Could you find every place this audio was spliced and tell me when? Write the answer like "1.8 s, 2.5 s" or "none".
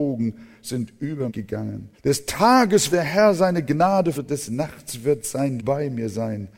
1.3 s, 1.9 s, 2.9 s, 4.1 s, 5.6 s